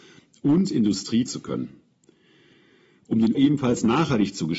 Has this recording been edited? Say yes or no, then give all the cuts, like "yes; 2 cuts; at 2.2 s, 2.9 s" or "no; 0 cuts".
yes; 2 cuts; at 1.3 s, 3.3 s